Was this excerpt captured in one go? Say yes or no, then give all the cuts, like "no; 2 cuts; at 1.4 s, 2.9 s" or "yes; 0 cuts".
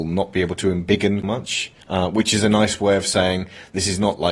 no; 2 cuts; at 1.2 s, 1.8 s